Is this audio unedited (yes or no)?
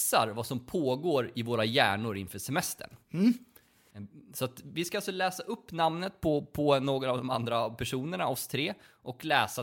no